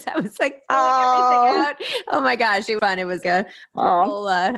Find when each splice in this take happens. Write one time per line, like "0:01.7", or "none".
0:02.8
0:03.2